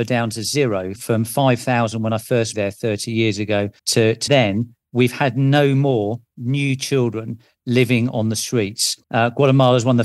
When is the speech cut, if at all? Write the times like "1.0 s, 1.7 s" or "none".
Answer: 1.0 s, 2.5 s, 3.8 s, 4.3 s, 9.0 s